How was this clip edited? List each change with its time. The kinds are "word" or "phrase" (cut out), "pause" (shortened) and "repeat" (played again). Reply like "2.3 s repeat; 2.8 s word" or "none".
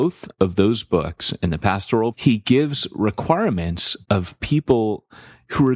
2.1 s word; 4.0 s word